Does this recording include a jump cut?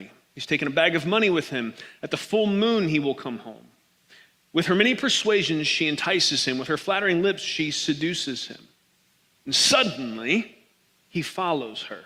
no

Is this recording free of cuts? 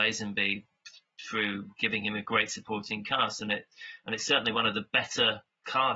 yes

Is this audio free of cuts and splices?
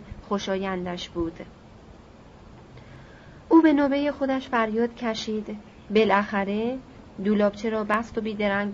yes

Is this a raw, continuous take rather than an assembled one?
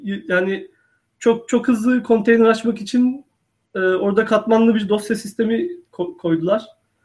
yes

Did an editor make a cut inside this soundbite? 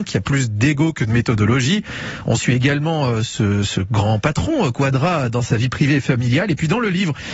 no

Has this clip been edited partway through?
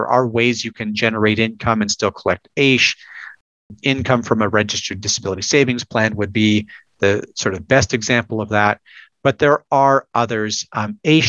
no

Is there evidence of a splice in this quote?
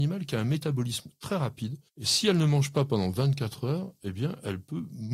yes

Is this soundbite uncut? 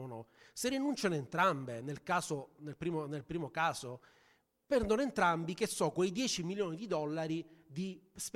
yes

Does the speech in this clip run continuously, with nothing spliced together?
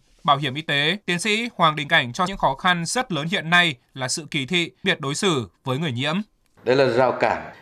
no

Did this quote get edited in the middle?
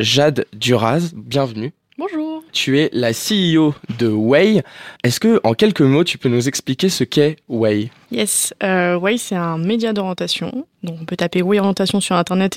yes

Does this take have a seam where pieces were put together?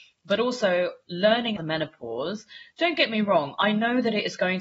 yes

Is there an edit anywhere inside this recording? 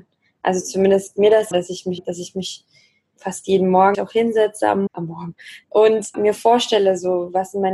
yes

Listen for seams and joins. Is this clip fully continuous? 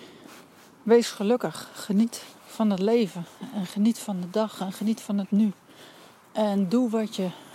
no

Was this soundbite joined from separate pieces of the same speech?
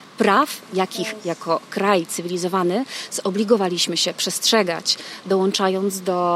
no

